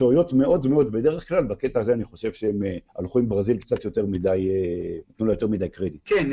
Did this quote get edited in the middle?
yes; 2 cuts; at 2.9 s, 5.0 s

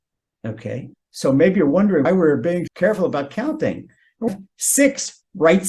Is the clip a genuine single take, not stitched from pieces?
no; 4 cuts; at 0.9 s, 2.0 s, 2.7 s, 4.3 s

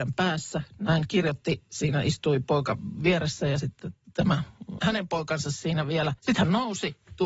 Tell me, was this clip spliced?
yes; 2 cuts; at 4.8 s, 6.2 s

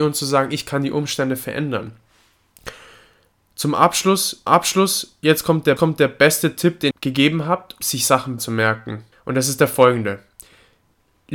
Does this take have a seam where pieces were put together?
yes; 6 cuts; at 4.5 s, 5.8 s, 6.9 s, 7.8 s, 8.4 s, 9.1 s

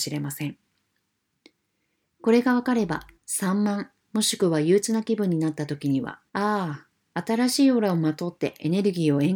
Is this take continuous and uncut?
no; 2 cuts; at 3.1 s, 6.3 s

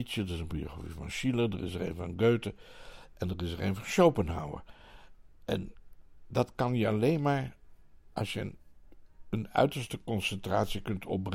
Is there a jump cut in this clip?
no; 0 cuts

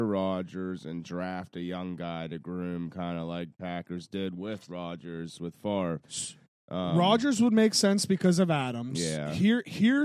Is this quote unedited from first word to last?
yes; 0 cuts

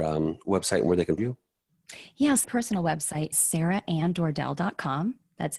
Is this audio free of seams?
no; 3 cuts; at 1.2 s, 2.4 s, 3.3 s

